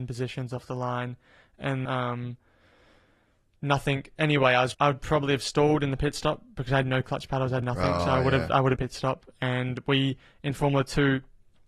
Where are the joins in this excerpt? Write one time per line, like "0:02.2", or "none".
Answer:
0:01.9
0:04.7
0:07.6
0:08.8